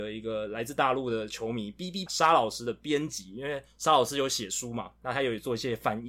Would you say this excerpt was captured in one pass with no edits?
no; 1 cut; at 2.1 s

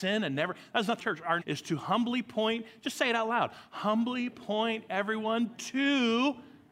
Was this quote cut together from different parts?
yes; 2 cuts; at 1.0 s, 1.4 s

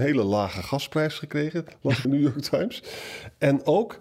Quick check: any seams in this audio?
yes; 2 cuts; at 1.7 s, 2.0 s

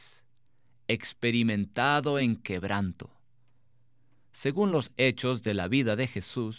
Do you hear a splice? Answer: no; 0 cuts

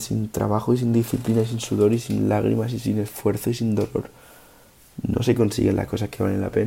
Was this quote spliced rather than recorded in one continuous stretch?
no; 0 cuts

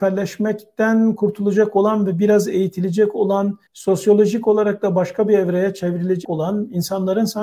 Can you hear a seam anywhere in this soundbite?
yes; 2 cuts; at 3.7 s, 6.2 s

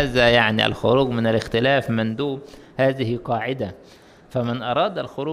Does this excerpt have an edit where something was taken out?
no; 0 cuts

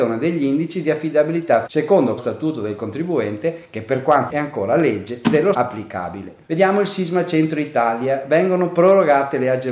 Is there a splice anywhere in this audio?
yes; 5 cuts; at 1.7 s, 2.2 s, 4.3 s, 5.5 s, 6.4 s

